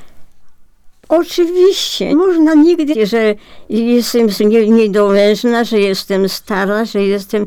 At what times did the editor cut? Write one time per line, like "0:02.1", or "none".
0:02.1
0:02.9
0:04.4